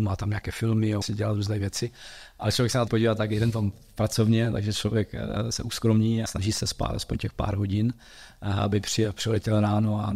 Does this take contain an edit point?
yes; 3 cuts; at 1.0 s, 2.9 s, 6.3 s

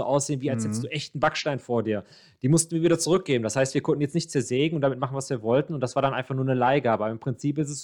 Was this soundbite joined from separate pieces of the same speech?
no; 0 cuts

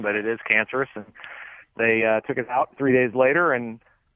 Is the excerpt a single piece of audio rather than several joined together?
yes; 0 cuts

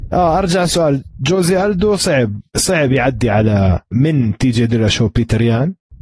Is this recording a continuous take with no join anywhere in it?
no; 2 cuts; at 2.5 s, 3.9 s

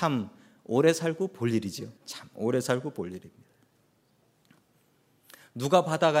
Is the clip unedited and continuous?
no; 1 cut; at 2.0 s

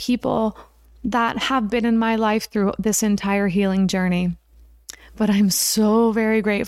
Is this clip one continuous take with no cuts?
yes; 0 cuts

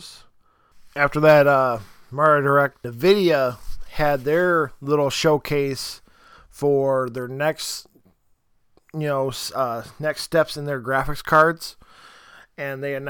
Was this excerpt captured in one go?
yes; 0 cuts

